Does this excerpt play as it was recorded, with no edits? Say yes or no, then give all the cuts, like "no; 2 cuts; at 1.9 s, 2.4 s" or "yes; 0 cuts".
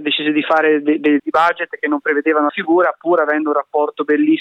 no; 2 cuts; at 1.2 s, 2.5 s